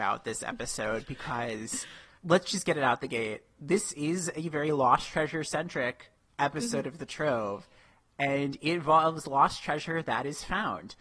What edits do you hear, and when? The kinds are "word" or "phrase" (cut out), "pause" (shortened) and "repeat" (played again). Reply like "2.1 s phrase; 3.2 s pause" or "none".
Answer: none